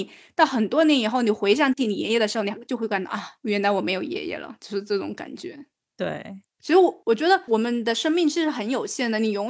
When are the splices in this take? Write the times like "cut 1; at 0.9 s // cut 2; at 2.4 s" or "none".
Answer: none